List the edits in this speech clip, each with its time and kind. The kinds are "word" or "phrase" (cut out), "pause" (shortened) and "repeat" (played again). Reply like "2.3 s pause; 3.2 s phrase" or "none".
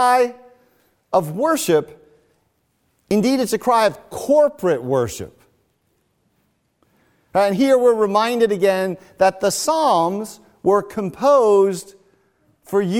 none